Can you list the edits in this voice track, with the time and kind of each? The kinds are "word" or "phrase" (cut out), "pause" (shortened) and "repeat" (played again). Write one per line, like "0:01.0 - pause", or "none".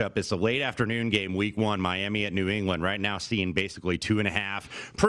none